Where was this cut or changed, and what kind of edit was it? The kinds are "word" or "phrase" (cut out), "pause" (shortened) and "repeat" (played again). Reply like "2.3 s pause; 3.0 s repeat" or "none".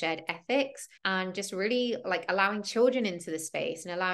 1.0 s pause